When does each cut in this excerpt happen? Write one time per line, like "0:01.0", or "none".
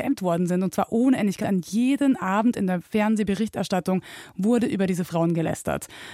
0:01.4